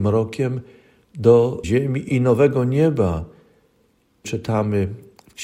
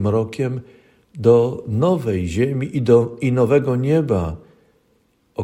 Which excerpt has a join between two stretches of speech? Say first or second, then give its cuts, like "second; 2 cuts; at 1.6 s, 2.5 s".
first; 3 cuts; at 1.6 s, 2.1 s, 4.2 s